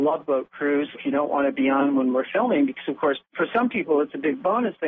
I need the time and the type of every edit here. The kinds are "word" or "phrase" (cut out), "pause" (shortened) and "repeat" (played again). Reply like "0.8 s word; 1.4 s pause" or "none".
0.9 s word; 3.2 s pause